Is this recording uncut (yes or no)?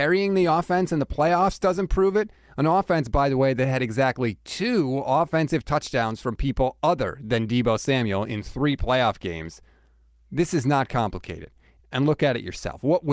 yes